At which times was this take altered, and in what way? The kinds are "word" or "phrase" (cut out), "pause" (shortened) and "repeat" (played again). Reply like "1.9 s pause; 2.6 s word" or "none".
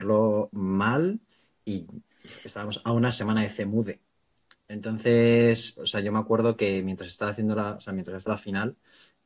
8.3 s word